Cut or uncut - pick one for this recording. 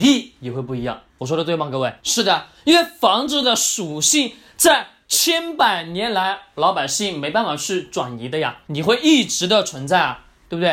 cut